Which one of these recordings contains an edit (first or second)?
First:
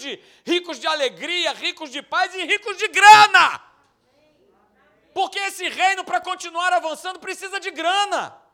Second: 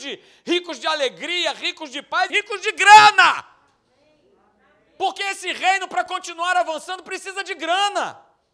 second